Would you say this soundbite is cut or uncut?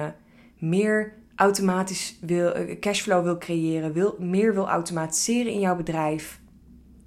uncut